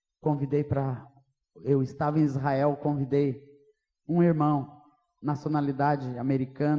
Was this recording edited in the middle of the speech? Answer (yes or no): no